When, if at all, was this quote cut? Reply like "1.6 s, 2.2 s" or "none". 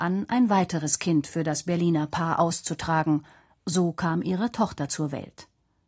none